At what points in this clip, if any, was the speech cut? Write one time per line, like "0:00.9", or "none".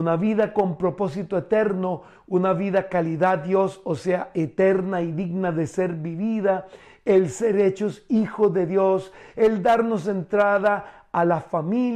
none